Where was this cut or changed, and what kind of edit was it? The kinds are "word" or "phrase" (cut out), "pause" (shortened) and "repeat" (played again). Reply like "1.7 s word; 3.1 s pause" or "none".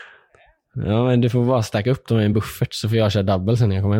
none